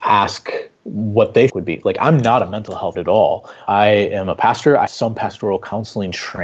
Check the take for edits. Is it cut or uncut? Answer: cut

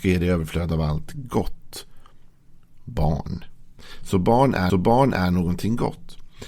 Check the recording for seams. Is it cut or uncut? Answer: cut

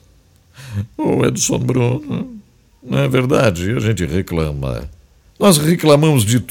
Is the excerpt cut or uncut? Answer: uncut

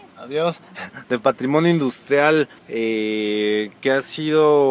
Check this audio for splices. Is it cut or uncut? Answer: cut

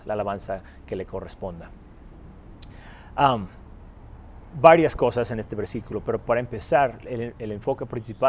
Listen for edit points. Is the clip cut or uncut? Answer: uncut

